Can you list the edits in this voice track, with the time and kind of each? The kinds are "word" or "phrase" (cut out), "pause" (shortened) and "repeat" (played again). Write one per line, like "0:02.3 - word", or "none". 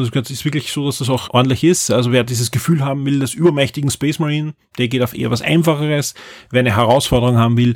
0:01.3 - word